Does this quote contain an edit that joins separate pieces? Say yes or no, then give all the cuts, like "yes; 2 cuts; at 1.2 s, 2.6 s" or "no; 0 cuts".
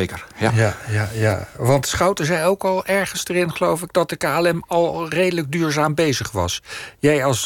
no; 0 cuts